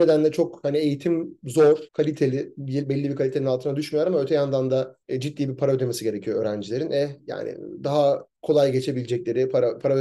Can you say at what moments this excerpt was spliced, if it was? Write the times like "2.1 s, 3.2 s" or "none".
1.9 s, 5.0 s, 8.4 s